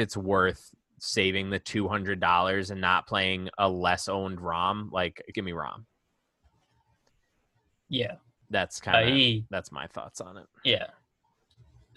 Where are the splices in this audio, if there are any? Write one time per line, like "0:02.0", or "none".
0:05.3